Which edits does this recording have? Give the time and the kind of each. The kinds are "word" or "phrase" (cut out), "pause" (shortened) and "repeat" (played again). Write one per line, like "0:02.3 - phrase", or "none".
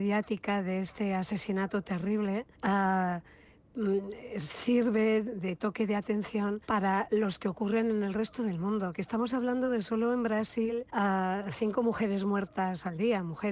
0:02.5 - pause
0:06.6 - pause
0:10.9 - pause